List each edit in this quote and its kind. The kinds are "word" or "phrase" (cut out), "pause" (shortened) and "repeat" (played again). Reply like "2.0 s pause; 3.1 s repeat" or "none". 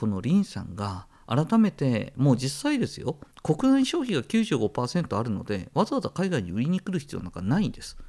3.3 s pause